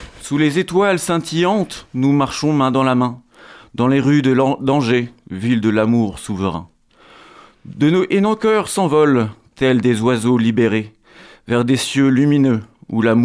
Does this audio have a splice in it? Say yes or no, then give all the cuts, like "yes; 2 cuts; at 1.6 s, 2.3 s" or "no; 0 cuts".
no; 0 cuts